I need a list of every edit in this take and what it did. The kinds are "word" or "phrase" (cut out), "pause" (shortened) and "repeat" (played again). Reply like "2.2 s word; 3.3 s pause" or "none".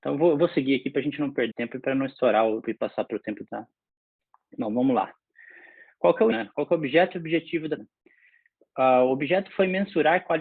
1.5 s word; 2.6 s word; 3.5 s word; 6.3 s word; 7.8 s word